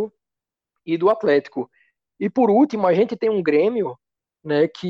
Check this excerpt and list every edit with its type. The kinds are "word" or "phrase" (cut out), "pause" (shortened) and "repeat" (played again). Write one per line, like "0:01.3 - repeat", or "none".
none